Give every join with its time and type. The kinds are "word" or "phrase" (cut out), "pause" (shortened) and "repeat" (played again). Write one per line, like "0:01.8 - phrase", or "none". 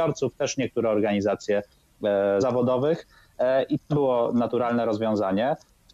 0:02.4 - word
0:03.9 - word